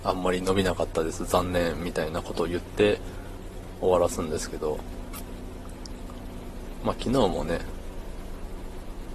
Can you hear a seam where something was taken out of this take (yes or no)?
no